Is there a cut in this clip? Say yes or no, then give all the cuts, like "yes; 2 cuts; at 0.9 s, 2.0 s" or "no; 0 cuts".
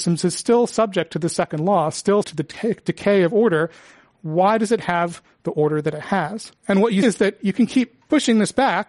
yes; 3 cuts; at 2.2 s, 6.6 s, 7.0 s